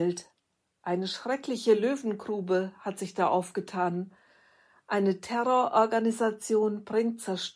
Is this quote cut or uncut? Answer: uncut